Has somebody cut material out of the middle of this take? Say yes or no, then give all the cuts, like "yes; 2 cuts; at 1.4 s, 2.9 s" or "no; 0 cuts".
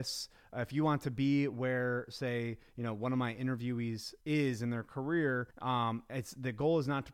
yes; 2 cuts; at 4.2 s, 5.5 s